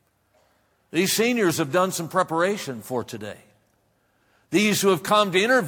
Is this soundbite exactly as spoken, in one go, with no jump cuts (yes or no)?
yes